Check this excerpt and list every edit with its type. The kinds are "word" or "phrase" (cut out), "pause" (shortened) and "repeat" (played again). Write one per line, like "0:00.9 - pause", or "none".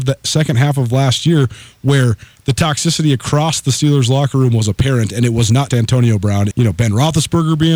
0:05.7 - word
0:06.5 - word